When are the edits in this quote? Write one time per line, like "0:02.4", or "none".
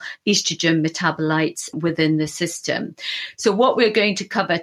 0:01.7